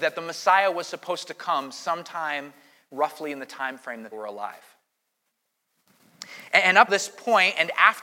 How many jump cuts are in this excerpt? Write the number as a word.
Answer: two